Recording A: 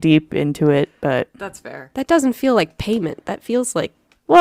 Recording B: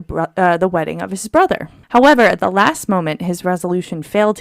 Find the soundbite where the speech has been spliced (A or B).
B